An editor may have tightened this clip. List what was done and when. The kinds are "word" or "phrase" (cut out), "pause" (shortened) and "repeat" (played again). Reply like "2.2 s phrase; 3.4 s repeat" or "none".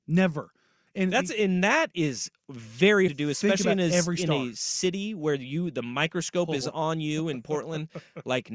3.1 s word